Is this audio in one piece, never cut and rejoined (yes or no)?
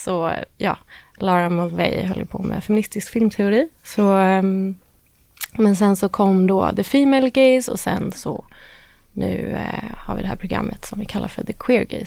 yes